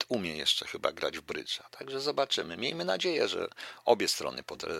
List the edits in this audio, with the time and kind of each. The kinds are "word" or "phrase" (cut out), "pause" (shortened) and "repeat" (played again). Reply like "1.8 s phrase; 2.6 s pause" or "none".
none